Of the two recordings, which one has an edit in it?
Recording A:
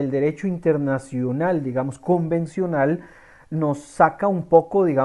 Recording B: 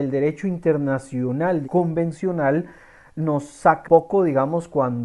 B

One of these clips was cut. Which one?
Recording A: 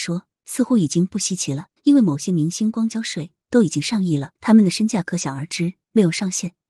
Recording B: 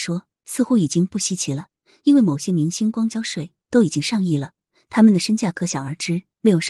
A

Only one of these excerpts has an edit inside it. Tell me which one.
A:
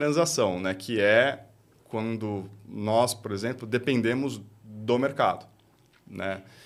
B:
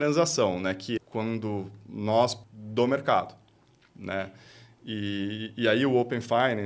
B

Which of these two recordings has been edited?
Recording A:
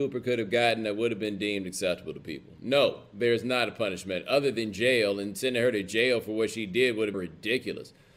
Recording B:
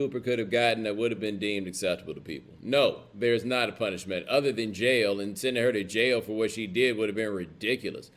A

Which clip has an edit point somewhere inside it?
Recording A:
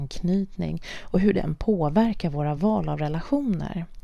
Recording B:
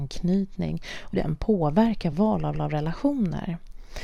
B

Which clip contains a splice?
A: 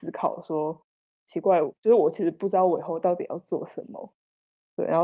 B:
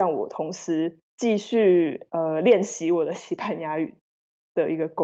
B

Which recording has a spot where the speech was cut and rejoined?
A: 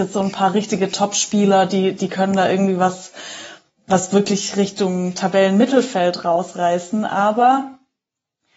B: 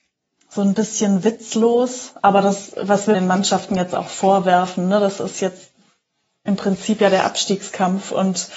B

